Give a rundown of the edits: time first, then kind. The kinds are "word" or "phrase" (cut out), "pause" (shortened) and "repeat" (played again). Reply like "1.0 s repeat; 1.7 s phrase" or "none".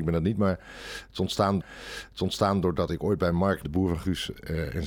1.6 s repeat; 3.6 s word